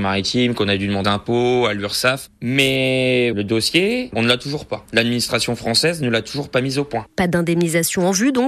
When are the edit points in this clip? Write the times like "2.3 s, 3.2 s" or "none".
1.0 s, 4.2 s